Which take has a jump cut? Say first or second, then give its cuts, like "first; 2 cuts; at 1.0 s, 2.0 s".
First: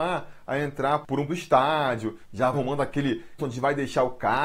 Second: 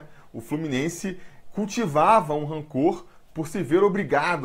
first; 3 cuts; at 1.3 s, 2.5 s, 3.4 s